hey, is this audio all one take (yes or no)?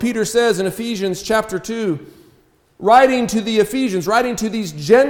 yes